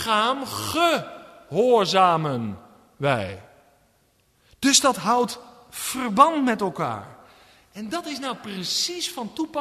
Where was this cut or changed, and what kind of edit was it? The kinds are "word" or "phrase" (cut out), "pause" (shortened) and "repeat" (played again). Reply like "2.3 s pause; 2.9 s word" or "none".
none